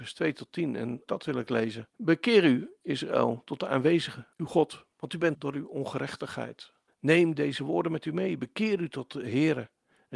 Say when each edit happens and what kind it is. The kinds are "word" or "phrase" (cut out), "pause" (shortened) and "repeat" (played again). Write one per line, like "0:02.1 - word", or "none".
0:01.1 - word
0:01.9 - pause
0:04.3 - pause
0:04.9 - pause
0:05.3 - word
0:06.9 - pause

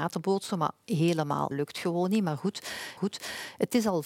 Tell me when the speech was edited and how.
0:01.5 - word
0:03.0 - repeat

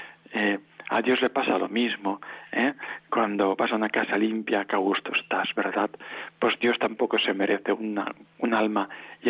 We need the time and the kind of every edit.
none

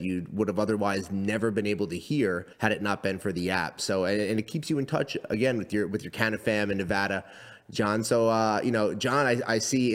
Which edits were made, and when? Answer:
0:02.5 - pause

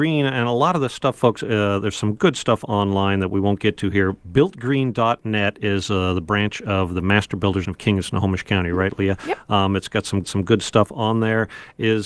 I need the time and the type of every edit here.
0:07.6 - word
0:10.2 - repeat

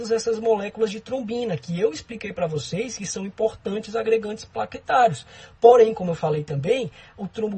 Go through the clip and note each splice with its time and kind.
none

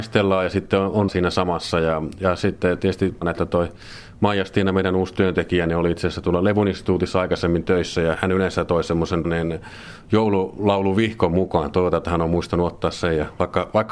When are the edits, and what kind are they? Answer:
0:01.1 - word
0:03.2 - word
0:08.1 - word
0:09.2 - word

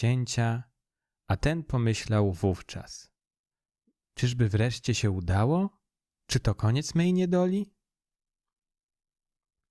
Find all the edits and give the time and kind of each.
none

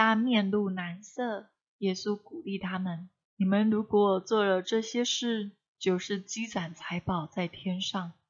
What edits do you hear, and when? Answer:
none

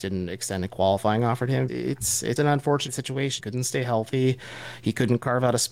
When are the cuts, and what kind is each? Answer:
0:01.7 - word
0:02.4 - word
0:02.9 - word
0:03.4 - word

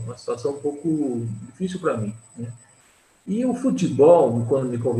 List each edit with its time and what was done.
none

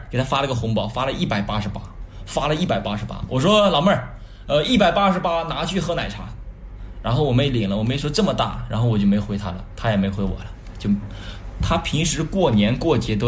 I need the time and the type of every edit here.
none

